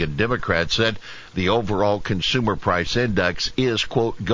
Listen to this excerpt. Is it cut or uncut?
uncut